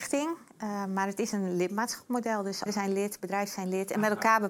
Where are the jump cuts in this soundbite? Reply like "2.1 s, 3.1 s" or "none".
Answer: 2.7 s